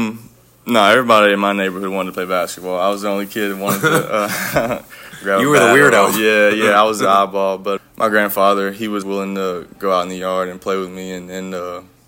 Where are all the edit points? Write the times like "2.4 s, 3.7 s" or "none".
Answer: 7.8 s, 9.0 s

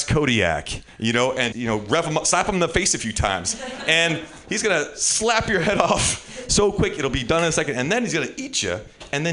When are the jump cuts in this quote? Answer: 1.5 s

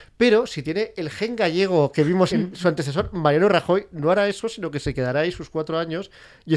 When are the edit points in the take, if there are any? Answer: 2.3 s

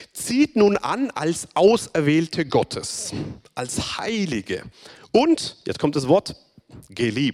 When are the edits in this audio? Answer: none

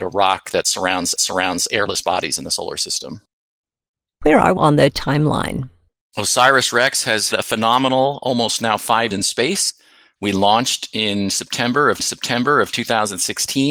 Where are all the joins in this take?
1.2 s, 4.6 s, 5.9 s, 7.3 s, 9.1 s, 12.0 s

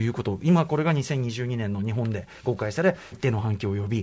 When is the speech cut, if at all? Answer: 3.1 s

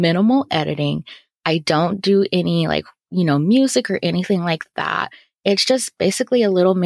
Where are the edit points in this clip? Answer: none

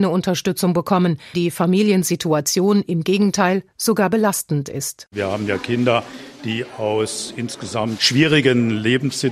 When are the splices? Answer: 1.3 s, 8.0 s

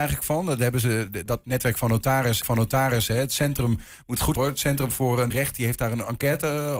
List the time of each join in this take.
2.4 s, 4.4 s, 5.3 s

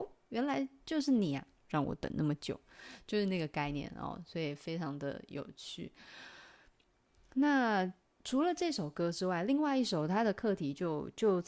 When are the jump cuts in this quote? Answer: none

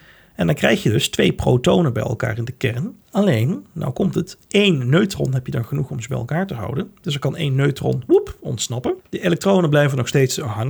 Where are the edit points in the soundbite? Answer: 3.0 s, 9.0 s

